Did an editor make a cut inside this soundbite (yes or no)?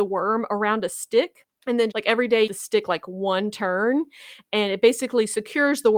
yes